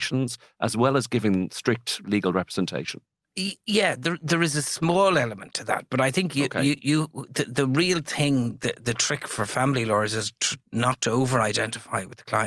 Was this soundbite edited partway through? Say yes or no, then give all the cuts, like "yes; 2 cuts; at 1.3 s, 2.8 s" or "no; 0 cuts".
no; 0 cuts